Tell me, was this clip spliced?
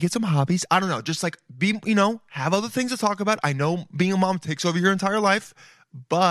no; 0 cuts

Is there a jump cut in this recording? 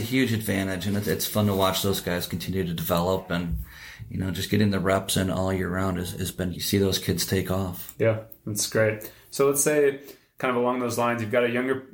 yes; 1 cut; at 6.5 s

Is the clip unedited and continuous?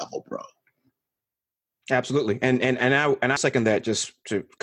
no; 1 cut; at 3.4 s

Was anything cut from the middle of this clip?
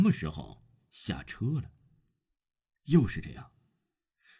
no; 0 cuts

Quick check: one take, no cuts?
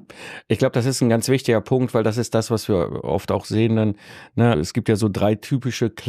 no; 1 cut; at 4.5 s

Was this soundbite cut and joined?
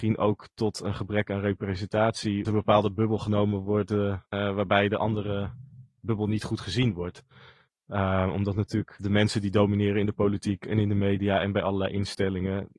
yes; 2 cuts; at 2.4 s, 4.3 s

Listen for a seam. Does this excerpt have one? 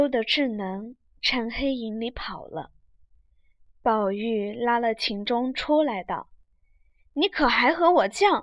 no; 0 cuts

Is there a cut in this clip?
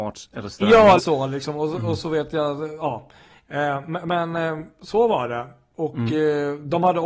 yes; 1 cut; at 1.0 s

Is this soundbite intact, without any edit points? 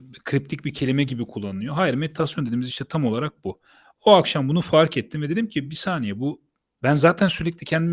yes; 0 cuts

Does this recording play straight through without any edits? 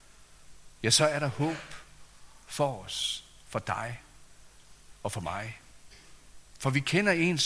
yes; 0 cuts

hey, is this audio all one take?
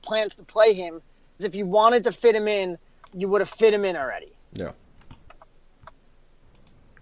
no; 1 cut; at 1.4 s

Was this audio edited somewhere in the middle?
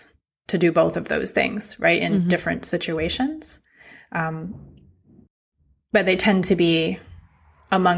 no; 0 cuts

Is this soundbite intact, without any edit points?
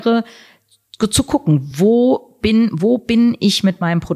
yes; 0 cuts

